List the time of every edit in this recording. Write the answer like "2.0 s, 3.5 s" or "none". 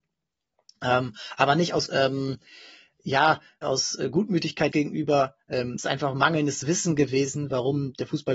1.9 s, 3.6 s, 4.7 s, 5.8 s

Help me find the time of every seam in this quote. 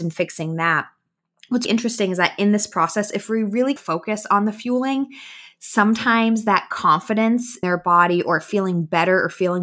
1.6 s, 3.8 s, 7.6 s

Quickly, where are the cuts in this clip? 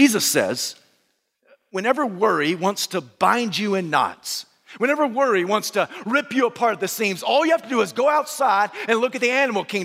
none

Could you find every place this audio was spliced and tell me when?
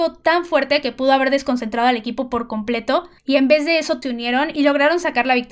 3.2 s, 4.0 s

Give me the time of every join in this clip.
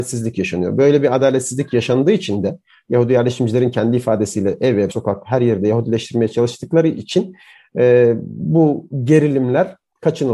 4.9 s

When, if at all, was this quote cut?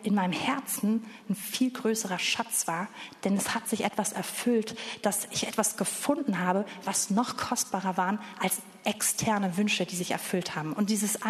none

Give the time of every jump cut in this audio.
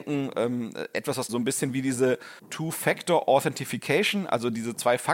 1.3 s, 2.4 s

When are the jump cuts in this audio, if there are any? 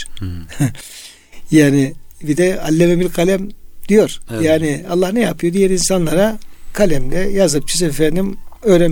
none

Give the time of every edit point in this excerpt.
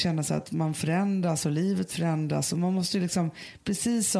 none

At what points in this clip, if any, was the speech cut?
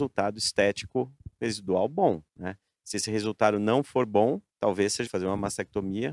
2.3 s, 4.5 s, 5.1 s

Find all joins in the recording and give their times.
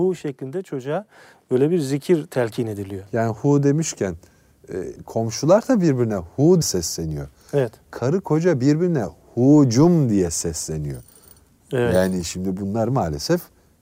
5.0 s, 6.6 s

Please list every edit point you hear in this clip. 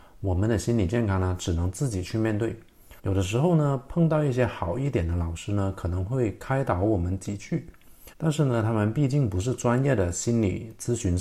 3.0 s, 8.1 s

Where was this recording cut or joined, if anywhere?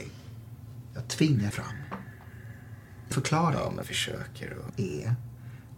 1.5 s, 3.1 s, 3.8 s, 4.7 s

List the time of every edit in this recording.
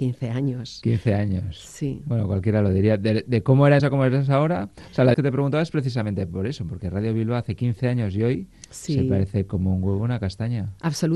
3.8 s, 5.1 s

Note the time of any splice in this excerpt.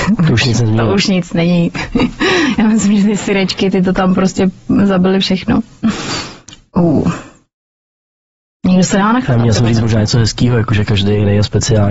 none

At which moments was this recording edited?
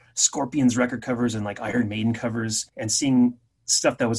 2.7 s

